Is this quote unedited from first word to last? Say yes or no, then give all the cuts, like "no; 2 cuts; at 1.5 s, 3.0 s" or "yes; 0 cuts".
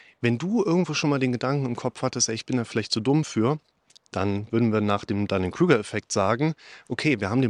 yes; 0 cuts